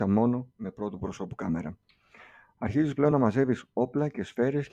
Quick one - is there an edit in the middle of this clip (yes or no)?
no